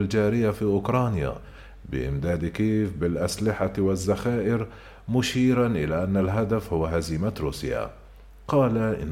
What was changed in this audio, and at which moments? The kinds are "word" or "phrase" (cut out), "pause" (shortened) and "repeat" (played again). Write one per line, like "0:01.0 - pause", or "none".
none